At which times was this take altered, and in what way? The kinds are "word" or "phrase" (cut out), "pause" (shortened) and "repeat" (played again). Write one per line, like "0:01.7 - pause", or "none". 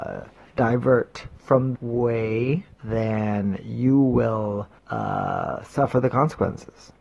0:01.7 - word
0:02.7 - pause
0:04.8 - pause